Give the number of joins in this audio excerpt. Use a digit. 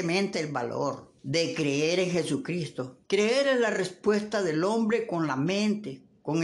2